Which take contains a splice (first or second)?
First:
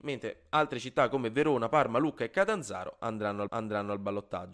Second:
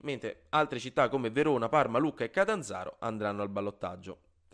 first